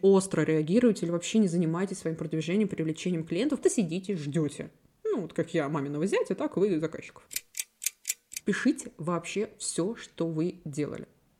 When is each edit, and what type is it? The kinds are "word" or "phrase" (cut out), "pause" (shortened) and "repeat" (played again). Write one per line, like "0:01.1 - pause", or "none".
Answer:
0:03.6 - word